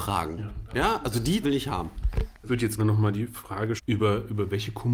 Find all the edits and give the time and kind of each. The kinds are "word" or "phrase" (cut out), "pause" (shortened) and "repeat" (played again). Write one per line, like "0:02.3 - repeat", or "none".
0:01.4 - word
0:02.5 - word
0:02.8 - word
0:03.8 - word